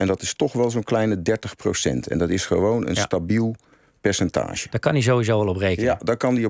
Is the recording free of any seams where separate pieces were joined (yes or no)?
yes